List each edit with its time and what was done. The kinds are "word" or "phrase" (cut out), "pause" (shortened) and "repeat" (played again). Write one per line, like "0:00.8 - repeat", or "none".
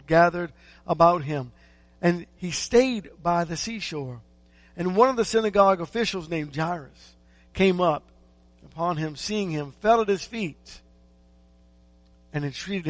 none